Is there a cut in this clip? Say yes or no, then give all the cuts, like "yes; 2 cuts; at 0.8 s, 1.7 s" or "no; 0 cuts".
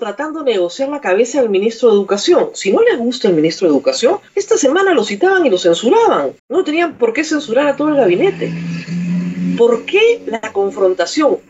yes; 2 cuts; at 4.3 s, 6.4 s